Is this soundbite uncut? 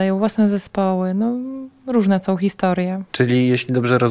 yes; 0 cuts

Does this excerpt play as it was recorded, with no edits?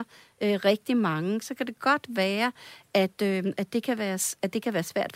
yes; 0 cuts

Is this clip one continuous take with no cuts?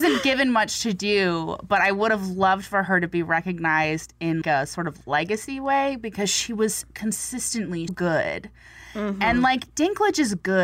no; 2 cuts; at 4.4 s, 7.9 s

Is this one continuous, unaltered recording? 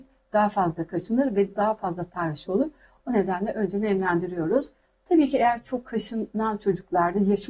yes; 0 cuts

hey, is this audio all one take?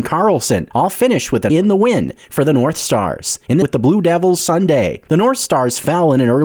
no; 2 cuts; at 1.5 s, 3.6 s

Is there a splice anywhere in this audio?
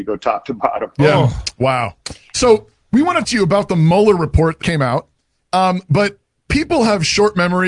yes; 2 cuts; at 3.2 s, 4.6 s

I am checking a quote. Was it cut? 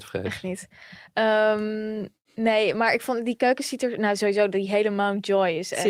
yes; 1 cut; at 2.2 s

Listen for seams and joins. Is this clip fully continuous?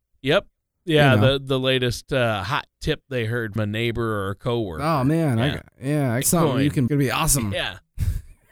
no; 4 cuts; at 3.6 s, 5.7 s, 6.2 s, 6.9 s

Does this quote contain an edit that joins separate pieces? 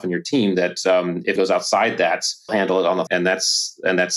yes; 3 cuts; at 1.4 s, 2.5 s, 3.1 s

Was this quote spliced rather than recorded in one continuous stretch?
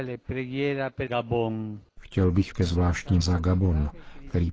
yes; 4 cuts; at 1.1 s, 1.9 s, 2.5 s, 3.2 s

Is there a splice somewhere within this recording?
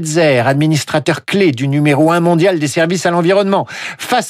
no; 0 cuts

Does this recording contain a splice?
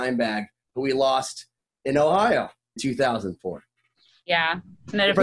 yes; 1 cut; at 2.8 s

